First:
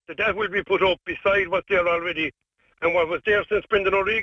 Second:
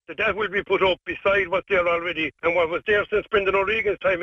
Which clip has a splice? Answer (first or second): second